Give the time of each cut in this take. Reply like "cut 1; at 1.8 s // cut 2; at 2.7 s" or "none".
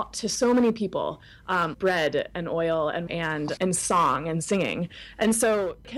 cut 1; at 1.7 s // cut 2; at 3.1 s // cut 3; at 3.6 s